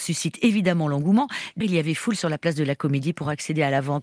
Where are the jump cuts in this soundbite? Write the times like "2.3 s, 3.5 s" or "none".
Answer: 1.6 s